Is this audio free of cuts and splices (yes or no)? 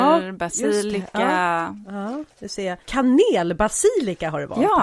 no